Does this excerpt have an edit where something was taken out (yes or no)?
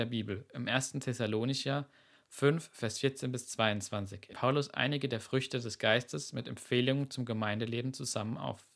yes